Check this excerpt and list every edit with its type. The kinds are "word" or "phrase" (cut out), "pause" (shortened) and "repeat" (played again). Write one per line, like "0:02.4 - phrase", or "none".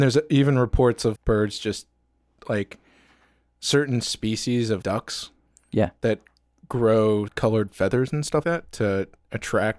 0:01.2 - word
0:04.8 - word
0:07.3 - word
0:08.4 - word